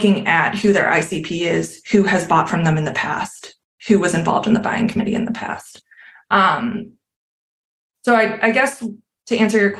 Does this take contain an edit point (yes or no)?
no